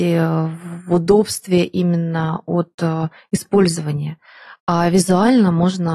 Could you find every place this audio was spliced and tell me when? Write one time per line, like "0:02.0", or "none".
none